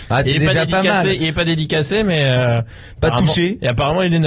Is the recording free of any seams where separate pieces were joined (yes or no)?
yes